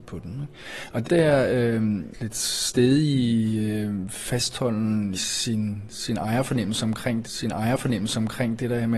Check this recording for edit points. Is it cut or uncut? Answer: cut